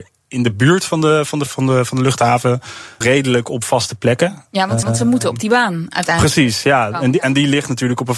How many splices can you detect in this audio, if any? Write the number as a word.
three